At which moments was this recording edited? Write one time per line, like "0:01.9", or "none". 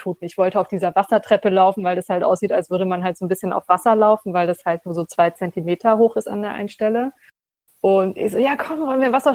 none